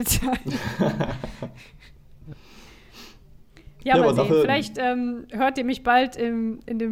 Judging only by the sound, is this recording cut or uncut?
cut